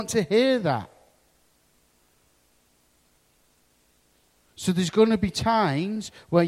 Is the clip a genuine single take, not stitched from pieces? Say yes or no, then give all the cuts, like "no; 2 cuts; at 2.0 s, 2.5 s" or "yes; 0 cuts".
yes; 0 cuts